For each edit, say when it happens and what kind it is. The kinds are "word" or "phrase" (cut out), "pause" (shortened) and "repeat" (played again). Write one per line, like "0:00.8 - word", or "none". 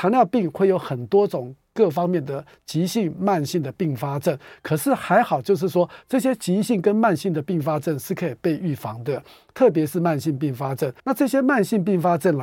0:11.0 - pause